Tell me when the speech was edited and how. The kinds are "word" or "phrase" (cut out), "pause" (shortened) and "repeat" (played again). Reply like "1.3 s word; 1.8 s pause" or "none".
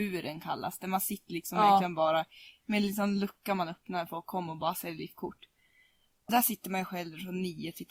6.3 s word